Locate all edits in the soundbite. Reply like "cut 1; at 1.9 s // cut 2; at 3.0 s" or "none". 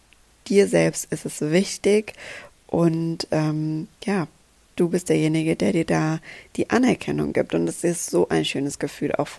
cut 1; at 3.9 s